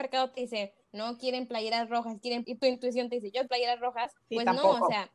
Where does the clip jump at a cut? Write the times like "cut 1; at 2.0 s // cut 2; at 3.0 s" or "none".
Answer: cut 1; at 2.4 s // cut 2; at 3.5 s // cut 3; at 4.2 s

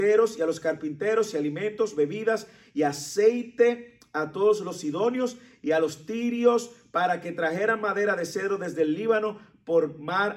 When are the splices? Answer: none

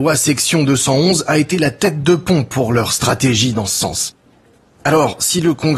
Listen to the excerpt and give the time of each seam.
none

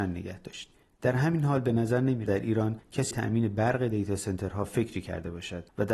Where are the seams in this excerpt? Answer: cut 1; at 2.3 s // cut 2; at 3.1 s

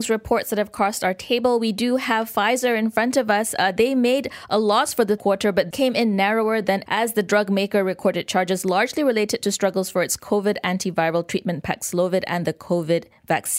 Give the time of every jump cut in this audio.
cut 1; at 5.2 s // cut 2; at 5.7 s // cut 3; at 6.9 s

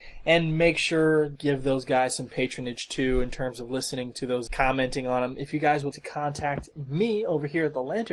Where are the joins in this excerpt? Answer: cut 1; at 1.3 s // cut 2; at 4.5 s // cut 3; at 5.9 s

